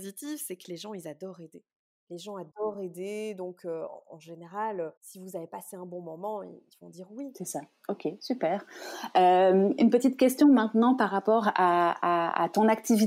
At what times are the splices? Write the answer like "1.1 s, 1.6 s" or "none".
1.9 s, 5.0 s